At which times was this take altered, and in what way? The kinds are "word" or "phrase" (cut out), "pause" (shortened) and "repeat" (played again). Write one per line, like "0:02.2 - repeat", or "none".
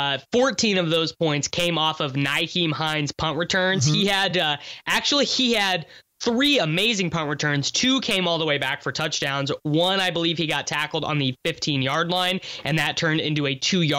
none